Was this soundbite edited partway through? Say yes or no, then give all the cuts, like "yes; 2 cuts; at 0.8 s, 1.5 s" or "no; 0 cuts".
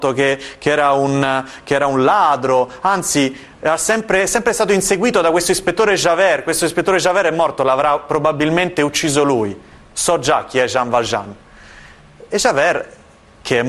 no; 0 cuts